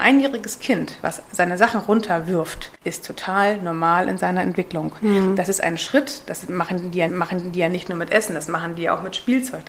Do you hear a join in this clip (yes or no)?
yes